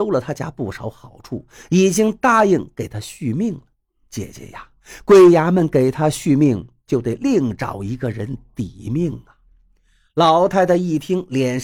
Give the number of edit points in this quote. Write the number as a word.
zero